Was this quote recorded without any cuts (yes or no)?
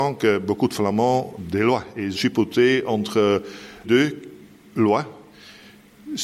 no